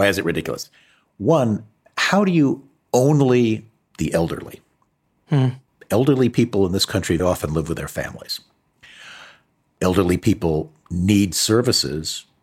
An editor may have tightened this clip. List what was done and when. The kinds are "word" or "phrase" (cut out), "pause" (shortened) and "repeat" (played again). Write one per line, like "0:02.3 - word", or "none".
0:03.8 - word
0:07.2 - word